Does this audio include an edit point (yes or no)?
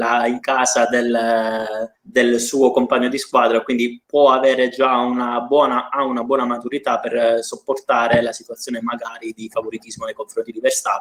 yes